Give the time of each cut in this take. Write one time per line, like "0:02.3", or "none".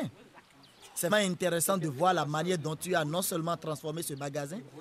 0:01.1